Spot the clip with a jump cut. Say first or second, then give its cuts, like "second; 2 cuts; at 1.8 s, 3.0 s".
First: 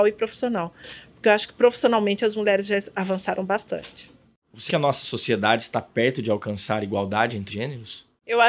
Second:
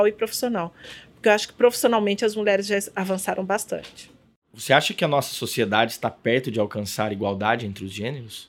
first; 2 cuts; at 4.7 s, 7.5 s